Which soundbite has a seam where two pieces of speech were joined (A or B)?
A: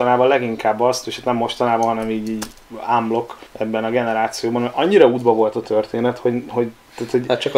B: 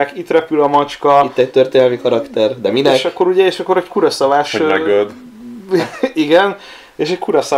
A